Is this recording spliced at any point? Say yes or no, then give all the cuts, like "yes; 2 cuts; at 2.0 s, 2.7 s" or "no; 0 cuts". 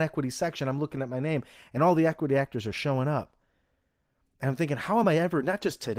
no; 0 cuts